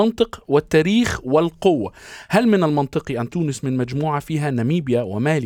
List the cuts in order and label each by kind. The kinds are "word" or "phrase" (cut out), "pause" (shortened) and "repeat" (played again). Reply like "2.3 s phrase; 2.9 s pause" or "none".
3.3 s word